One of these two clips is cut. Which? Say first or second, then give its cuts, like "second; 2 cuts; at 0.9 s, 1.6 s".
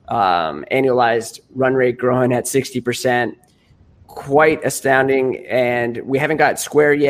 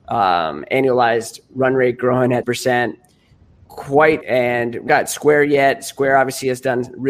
second; 3 cuts; at 2.4 s, 4.2 s, 4.9 s